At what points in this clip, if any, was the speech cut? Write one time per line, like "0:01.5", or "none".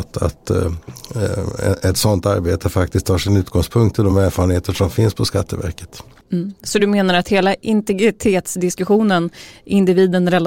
none